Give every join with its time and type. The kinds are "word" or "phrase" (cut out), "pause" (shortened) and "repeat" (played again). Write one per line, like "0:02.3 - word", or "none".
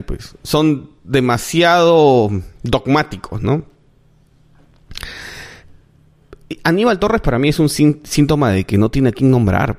0:02.5 - pause